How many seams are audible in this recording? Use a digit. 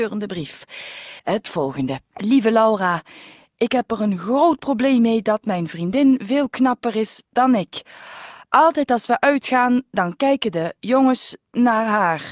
2